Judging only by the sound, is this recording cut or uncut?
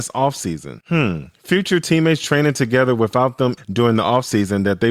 cut